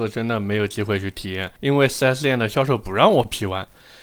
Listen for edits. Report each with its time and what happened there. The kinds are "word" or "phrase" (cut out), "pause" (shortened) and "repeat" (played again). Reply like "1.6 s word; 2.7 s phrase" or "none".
1.6 s pause